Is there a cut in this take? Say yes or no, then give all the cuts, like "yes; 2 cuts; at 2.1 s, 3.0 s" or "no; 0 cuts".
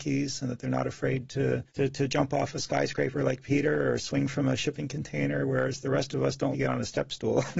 yes; 2 cuts; at 1.7 s, 6.5 s